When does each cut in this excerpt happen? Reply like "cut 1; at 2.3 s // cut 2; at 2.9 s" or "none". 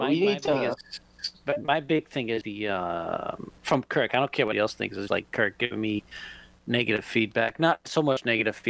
cut 1; at 2.4 s // cut 2; at 3.6 s // cut 3; at 4.5 s // cut 4; at 5.1 s